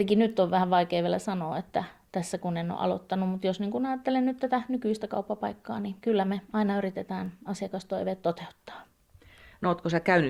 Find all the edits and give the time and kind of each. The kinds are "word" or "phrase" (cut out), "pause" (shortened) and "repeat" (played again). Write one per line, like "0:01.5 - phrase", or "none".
none